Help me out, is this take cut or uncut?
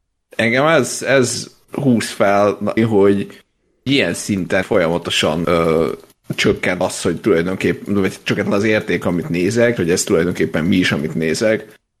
cut